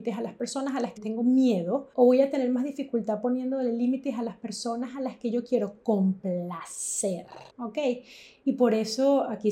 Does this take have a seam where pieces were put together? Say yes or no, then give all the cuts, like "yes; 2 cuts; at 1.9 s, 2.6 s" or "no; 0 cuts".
yes; 3 cuts; at 1.0 s, 1.9 s, 7.5 s